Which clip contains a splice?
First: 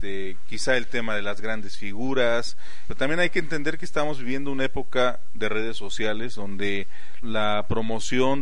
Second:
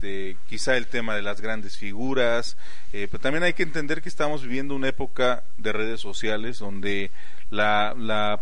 first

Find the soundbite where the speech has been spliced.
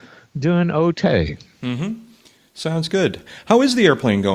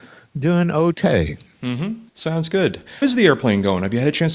second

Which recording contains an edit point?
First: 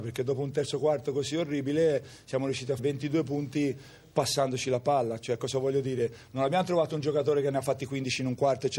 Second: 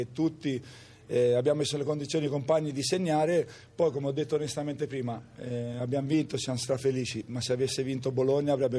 first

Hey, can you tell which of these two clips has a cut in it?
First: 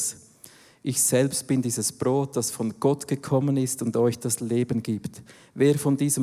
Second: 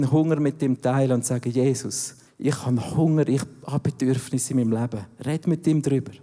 second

